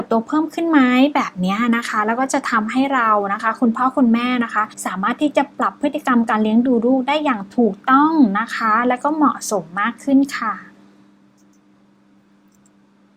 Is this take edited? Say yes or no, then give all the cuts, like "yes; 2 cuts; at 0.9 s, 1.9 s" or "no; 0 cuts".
yes; 1 cut; at 4.7 s